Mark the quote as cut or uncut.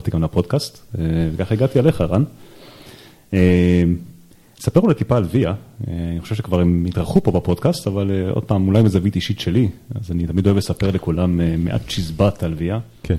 uncut